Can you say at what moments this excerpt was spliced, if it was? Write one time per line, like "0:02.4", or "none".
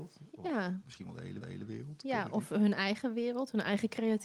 0:01.4